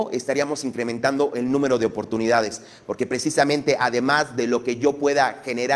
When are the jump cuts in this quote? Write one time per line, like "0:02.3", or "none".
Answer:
none

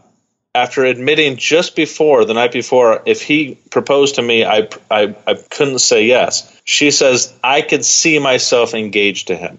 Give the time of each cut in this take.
0:05.5
0:06.6

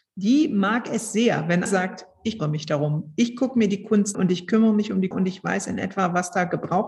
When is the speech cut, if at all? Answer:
0:01.7
0:02.4
0:04.1
0:05.1

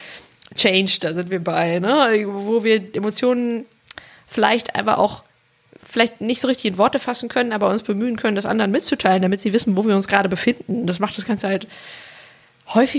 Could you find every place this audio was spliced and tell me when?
none

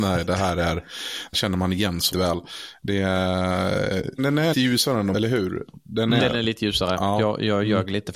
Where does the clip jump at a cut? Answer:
0:01.3
0:02.1
0:04.2
0:04.5
0:05.1
0:06.2

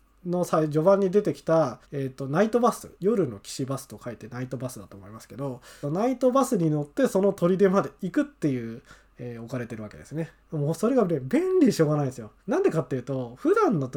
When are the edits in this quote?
0:01.8
0:03.0
0:05.8
0:09.1
0:10.4
0:12.4

